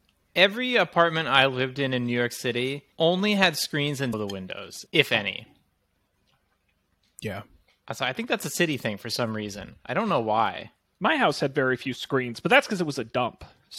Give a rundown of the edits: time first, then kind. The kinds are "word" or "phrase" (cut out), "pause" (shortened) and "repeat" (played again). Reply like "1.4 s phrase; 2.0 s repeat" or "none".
2.9 s pause; 4.1 s word; 4.9 s pause